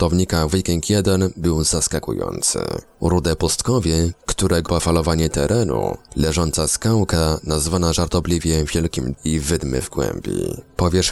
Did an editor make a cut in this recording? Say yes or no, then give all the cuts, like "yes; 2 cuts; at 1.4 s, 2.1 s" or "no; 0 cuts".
yes; 2 cuts; at 4.7 s, 9.1 s